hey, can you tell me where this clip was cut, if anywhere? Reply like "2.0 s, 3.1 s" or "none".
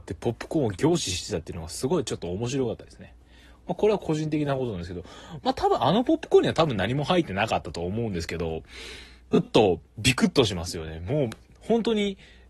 9.9 s